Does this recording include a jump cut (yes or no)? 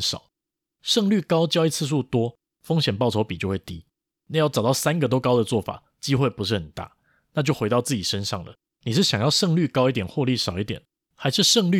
no